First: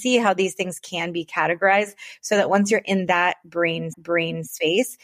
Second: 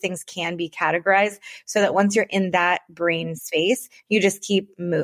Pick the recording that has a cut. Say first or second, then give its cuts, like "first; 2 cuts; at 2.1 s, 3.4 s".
first; 1 cut; at 3.9 s